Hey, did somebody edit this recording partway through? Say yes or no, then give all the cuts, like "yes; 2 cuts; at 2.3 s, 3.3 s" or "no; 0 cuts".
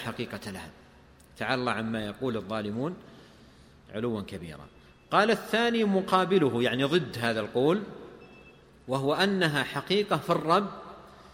no; 0 cuts